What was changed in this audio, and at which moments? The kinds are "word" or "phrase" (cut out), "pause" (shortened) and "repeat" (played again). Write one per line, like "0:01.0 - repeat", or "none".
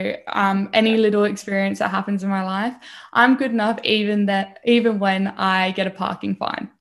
none